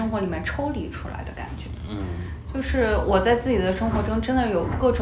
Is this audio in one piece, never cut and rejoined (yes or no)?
yes